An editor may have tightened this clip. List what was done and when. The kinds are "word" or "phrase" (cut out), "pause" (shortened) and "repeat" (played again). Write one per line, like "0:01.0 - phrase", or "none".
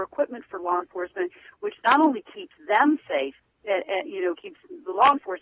none